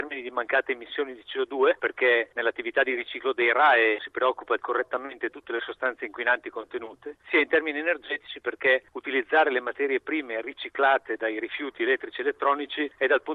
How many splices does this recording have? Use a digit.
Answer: 2